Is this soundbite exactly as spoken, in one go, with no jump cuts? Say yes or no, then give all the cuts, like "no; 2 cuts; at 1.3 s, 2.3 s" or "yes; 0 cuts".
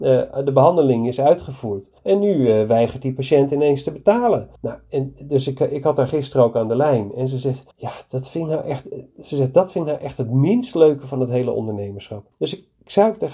no; 4 cuts; at 2.0 s, 4.6 s, 7.7 s, 12.3 s